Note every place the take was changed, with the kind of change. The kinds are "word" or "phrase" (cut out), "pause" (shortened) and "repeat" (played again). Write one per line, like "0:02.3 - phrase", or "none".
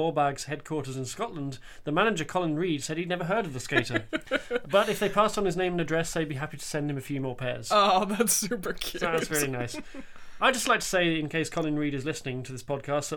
none

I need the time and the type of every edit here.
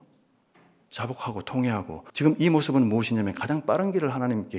0:02.1 - pause

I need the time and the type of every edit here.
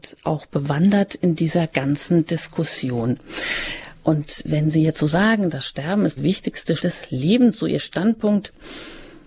0:06.2 - phrase
0:06.8 - word

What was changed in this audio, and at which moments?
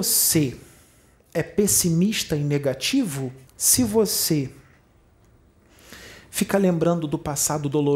0:03.5 - pause

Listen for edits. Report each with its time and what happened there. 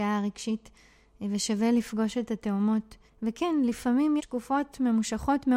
0:03.1 - pause
0:04.2 - word

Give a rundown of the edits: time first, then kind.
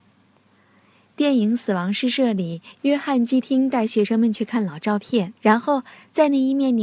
0:05.4 - pause

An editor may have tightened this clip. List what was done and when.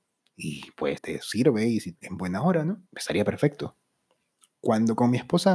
0:01.0 - word
0:01.9 - word
0:02.9 - pause

